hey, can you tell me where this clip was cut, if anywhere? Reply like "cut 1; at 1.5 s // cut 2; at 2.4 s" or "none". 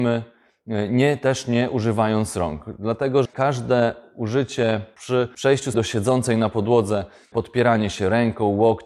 cut 1; at 3.2 s // cut 2; at 5.7 s